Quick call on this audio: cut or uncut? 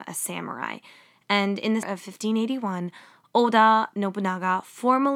cut